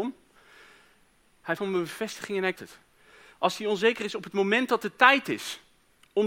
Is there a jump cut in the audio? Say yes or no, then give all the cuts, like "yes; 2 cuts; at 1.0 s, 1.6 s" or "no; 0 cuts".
yes; 2 cuts; at 1.6 s, 2.5 s